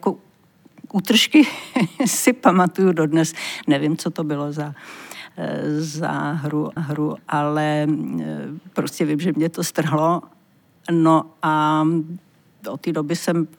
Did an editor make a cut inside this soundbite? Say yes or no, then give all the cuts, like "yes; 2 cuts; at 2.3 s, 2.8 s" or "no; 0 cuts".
yes; 1 cut; at 6.8 s